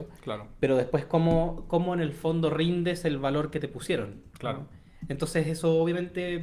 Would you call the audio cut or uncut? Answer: uncut